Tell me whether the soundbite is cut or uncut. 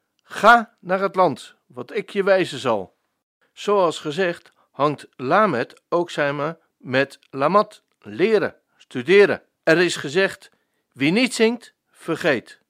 cut